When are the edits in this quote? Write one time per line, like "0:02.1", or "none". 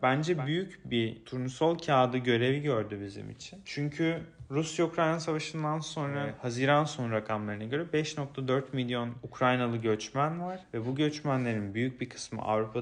none